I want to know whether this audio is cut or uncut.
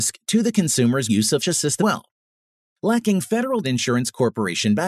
cut